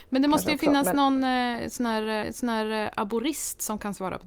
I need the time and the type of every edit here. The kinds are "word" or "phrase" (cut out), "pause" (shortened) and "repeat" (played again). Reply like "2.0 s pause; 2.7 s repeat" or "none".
2.2 s repeat